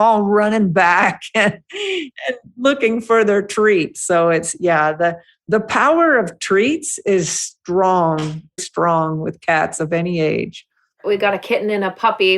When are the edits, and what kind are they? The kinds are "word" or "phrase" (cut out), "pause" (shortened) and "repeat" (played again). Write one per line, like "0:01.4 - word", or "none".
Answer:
0:08.6 - phrase

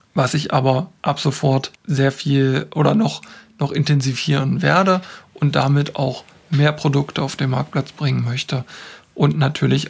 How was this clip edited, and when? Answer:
0:01.8 - pause

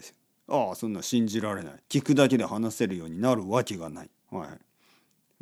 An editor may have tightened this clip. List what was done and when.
0:01.8 - pause
0:04.2 - pause

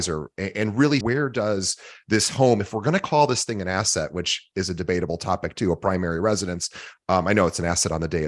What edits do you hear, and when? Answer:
0:01.0 - word

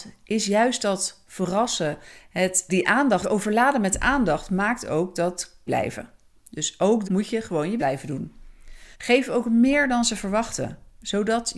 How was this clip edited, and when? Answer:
0:02.7 - word
0:03.2 - word
0:05.7 - phrase
0:07.0 - word
0:07.8 - word
0:08.9 - pause

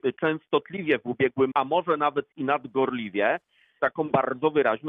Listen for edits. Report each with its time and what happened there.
0:01.5 - word
0:03.8 - word

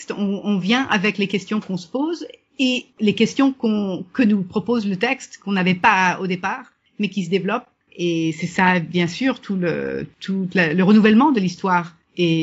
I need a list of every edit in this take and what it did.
none

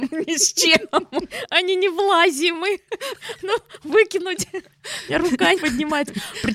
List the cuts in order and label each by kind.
0:05.6 - word

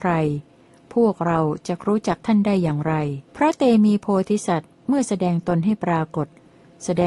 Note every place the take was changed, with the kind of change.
0:03.3 - pause

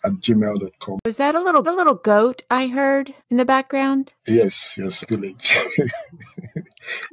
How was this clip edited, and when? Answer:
0:01.6 - repeat
0:03.2 - pause
0:04.2 - pause
0:05.0 - phrase

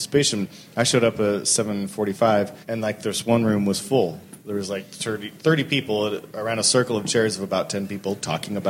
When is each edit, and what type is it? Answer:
0:02.6 - pause

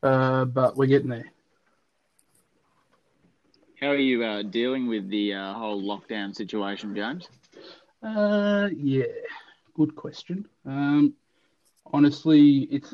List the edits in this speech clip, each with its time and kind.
none

